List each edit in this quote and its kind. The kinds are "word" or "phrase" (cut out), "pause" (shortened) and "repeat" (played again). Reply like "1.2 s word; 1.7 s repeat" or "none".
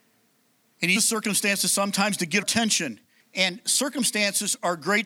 1.0 s word; 2.4 s word; 3.2 s pause